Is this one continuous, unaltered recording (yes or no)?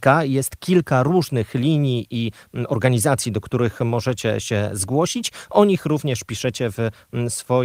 yes